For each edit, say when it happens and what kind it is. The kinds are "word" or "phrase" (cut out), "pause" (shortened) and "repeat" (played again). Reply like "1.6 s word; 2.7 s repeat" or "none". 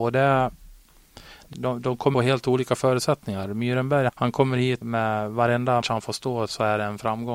1.5 s phrase; 2.1 s phrase; 4.1 s word; 4.8 s word; 5.8 s word